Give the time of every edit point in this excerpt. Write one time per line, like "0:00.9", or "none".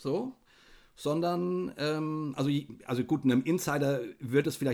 none